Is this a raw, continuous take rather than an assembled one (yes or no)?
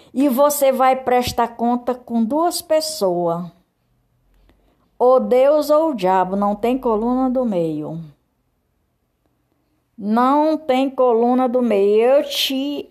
yes